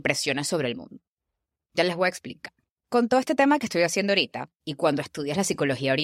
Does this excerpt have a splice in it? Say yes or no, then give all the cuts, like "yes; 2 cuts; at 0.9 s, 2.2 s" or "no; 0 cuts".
no; 0 cuts